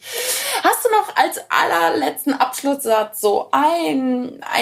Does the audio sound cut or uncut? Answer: uncut